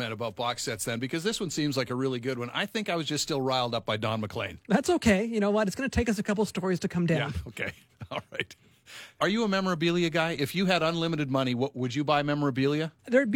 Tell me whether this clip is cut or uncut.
uncut